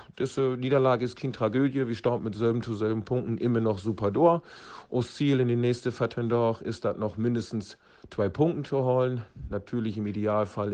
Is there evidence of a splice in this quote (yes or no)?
no